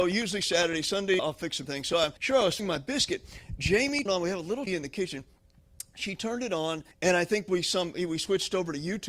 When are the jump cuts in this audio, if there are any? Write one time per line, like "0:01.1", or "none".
0:01.2
0:01.6
0:02.2
0:02.6
0:04.1
0:04.7
0:06.9